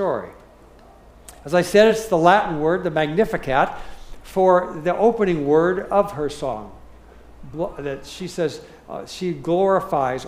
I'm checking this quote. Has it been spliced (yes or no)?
no